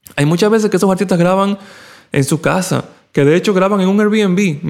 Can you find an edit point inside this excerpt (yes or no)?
no